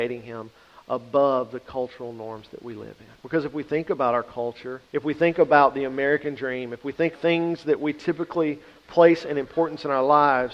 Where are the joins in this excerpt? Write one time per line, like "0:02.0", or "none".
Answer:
0:03.2
0:04.9
0:07.1